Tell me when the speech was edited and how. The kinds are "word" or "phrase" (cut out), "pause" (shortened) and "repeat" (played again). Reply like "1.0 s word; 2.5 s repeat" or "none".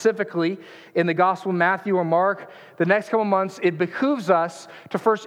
none